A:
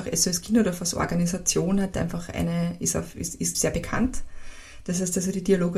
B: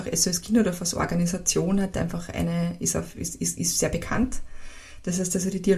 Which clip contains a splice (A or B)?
A